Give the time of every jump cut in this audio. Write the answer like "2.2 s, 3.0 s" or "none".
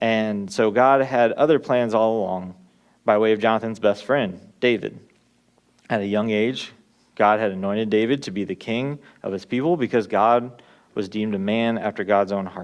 none